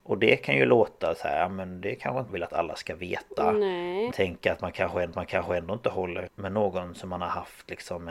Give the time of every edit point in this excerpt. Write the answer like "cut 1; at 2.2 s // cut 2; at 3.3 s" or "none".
cut 1; at 2.3 s // cut 2; at 4.1 s // cut 3; at 5.1 s // cut 4; at 6.3 s